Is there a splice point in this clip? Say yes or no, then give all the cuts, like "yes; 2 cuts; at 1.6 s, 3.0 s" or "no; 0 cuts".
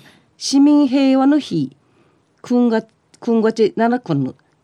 no; 0 cuts